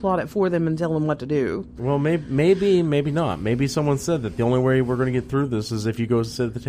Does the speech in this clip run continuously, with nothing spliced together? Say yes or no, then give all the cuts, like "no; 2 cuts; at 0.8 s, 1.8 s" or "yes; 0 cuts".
yes; 0 cuts